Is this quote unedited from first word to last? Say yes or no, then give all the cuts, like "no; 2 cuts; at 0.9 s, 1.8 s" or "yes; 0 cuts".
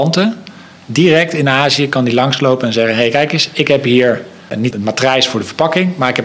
no; 1 cut; at 4.7 s